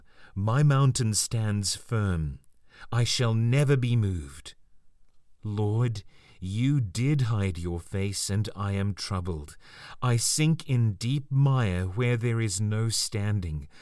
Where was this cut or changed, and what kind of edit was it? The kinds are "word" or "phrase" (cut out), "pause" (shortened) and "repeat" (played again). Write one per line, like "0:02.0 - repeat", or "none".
none